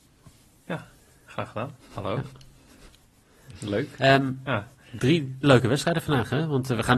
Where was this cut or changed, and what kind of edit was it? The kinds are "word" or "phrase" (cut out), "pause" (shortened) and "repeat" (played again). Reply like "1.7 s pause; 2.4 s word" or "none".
1.8 s pause; 5.4 s word